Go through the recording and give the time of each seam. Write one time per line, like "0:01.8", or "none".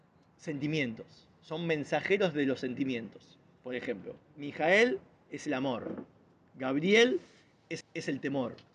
0:07.8